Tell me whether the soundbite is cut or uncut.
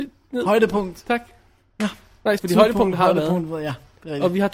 cut